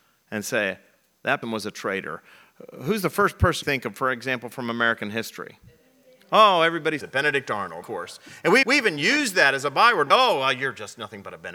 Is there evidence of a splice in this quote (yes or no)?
yes